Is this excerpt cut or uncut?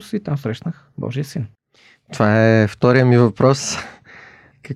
uncut